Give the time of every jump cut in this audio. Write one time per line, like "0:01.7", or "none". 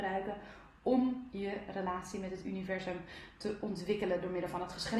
none